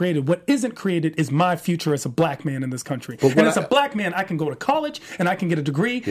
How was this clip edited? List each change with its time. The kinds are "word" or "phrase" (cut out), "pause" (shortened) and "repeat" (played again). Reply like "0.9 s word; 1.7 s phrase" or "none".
none